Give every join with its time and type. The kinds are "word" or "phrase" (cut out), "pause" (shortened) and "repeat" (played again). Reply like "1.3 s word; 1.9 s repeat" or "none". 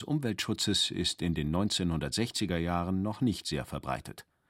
none